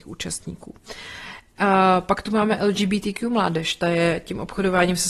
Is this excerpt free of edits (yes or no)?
yes